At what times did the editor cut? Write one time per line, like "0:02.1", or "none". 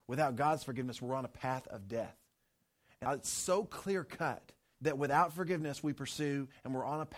0:03.0
0:04.7